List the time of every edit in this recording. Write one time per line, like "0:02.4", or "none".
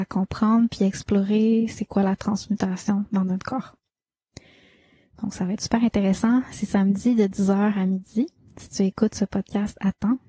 none